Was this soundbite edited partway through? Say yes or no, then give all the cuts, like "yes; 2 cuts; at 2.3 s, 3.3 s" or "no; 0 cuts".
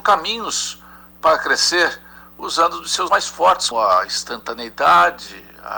yes; 2 cuts; at 3.1 s, 3.7 s